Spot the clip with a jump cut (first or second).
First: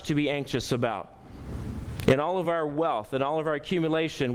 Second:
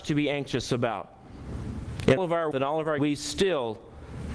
second